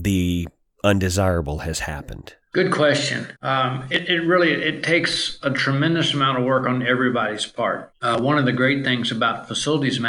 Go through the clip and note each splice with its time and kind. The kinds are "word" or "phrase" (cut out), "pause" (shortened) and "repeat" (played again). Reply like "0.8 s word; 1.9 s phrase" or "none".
2.4 s pause; 3.4 s pause